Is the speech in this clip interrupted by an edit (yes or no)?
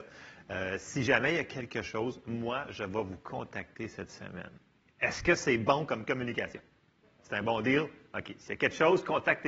no